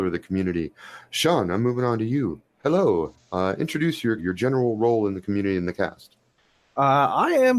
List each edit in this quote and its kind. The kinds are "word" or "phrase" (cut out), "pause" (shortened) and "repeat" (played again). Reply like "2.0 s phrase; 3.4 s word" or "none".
4.2 s word

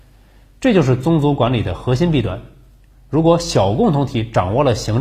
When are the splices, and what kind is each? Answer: none

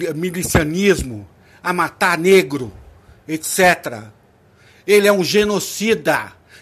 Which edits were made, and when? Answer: none

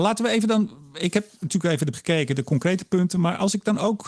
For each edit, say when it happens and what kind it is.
1.9 s word

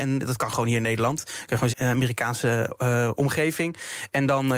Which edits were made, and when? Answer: 1.7 s word

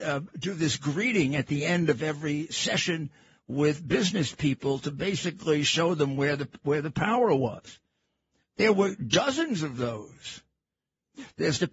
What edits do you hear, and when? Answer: none

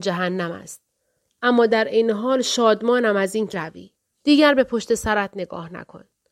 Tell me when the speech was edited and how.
3.5 s word; 4.0 s pause

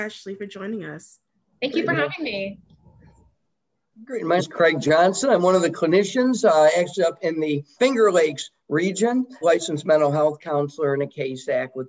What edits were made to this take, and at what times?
4.4 s word; 7.8 s word; 9.4 s word

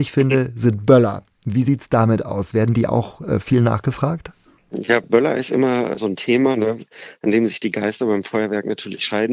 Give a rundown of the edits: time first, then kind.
none

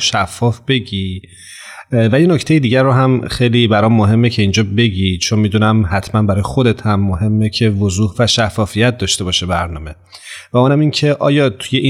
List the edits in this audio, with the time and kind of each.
none

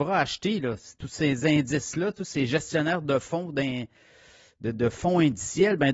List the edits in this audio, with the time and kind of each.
none

